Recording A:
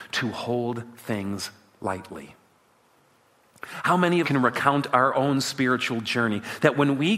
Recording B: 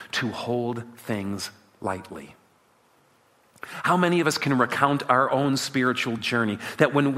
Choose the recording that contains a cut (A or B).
A